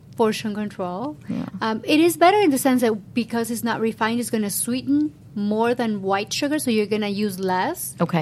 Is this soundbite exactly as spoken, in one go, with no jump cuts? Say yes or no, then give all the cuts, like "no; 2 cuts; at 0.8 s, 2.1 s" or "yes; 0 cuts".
yes; 0 cuts